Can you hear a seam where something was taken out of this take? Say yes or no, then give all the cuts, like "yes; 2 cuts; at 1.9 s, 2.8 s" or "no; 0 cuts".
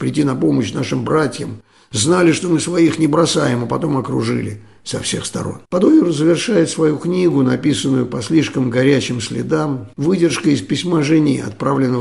yes; 2 cuts; at 5.6 s, 9.9 s